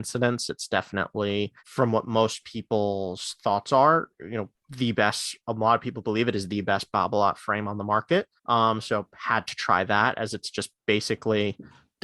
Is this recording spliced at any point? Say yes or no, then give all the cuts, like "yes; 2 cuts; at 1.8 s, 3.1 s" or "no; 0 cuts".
yes; 4 cuts; at 1.6 s, 4.1 s, 4.6 s, 8.4 s